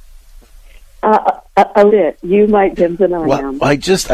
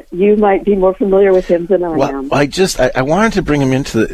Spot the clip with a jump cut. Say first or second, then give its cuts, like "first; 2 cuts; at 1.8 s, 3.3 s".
first; 3 cuts; at 1.5 s, 1.9 s, 2.8 s